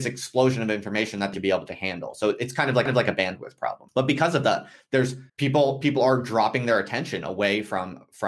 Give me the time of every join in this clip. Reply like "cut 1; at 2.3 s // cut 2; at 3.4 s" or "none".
cut 1; at 1.3 s // cut 2; at 2.9 s // cut 3; at 3.9 s // cut 4; at 5.3 s